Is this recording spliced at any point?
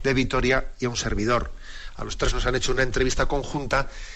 no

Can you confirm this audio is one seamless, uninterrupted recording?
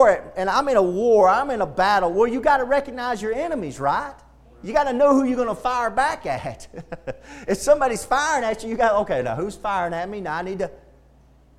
yes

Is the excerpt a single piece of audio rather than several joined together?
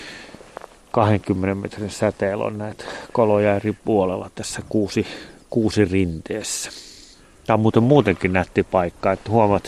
yes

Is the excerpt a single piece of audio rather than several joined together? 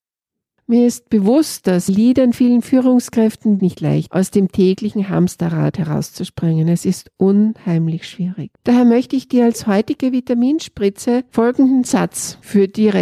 no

